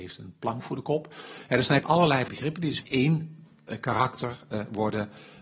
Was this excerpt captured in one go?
no; 3 cuts; at 1.8 s, 2.3 s, 2.8 s

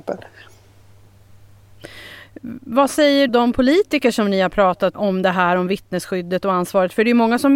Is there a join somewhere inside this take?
yes; 2 cuts; at 3.3 s, 4.9 s

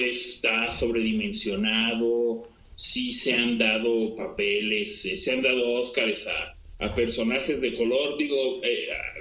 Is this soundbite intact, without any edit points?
yes; 0 cuts

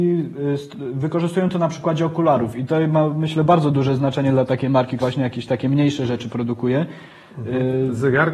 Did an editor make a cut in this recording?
yes; 1 cut; at 5.0 s

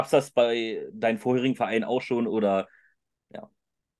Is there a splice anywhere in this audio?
no; 0 cuts

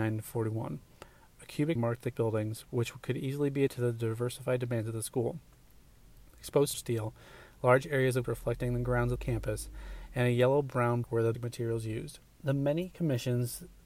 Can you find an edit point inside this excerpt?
yes; 8 cuts; at 1.8 s, 2.1 s, 3.7 s, 6.7 s, 8.2 s, 9.2 s, 11.0 s, 11.3 s

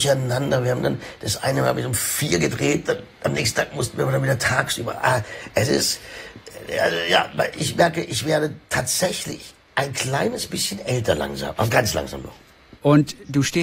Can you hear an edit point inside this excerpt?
no; 0 cuts

